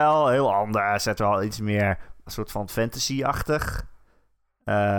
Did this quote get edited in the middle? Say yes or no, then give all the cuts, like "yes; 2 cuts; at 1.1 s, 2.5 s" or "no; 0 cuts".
yes; 2 cuts; at 1.2 s, 2.3 s